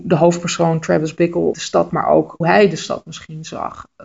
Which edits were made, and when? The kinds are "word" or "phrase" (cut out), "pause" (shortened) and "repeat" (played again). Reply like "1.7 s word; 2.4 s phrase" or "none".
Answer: 1.5 s word; 1.9 s word; 2.4 s word